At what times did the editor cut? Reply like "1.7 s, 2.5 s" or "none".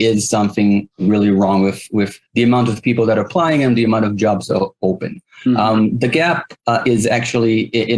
2.3 s, 6.6 s